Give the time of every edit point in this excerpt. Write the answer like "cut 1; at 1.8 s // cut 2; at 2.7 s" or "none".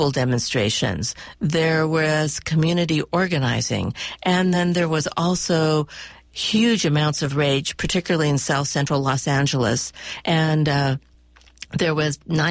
none